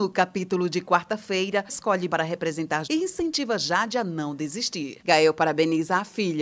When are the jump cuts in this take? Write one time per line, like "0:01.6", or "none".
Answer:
0:01.7
0:02.1
0:02.8